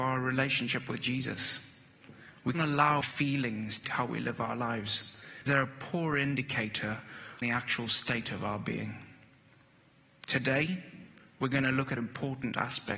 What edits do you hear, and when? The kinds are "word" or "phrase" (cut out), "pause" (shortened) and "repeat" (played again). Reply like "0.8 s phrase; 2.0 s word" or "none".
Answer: 2.5 s word; 3.0 s word; 3.8 s word; 5.5 s word; 7.4 s word; 12.0 s word